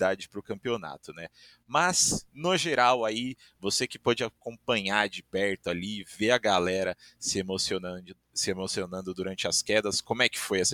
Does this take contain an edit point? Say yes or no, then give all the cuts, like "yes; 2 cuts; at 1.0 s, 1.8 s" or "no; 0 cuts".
no; 0 cuts